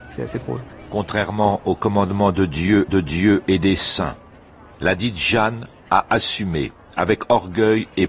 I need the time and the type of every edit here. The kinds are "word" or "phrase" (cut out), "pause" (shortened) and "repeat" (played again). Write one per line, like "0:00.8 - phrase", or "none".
0:02.9 - repeat

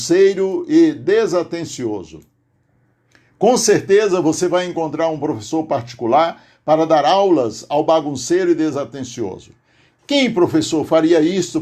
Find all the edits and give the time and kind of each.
none

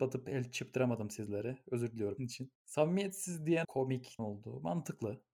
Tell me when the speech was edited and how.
0:02.2 - word
0:02.6 - pause
0:03.6 - word
0:04.2 - phrase

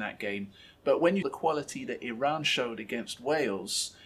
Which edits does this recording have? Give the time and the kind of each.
0:01.2 - word

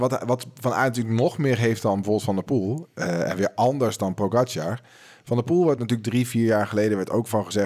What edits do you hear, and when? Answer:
none

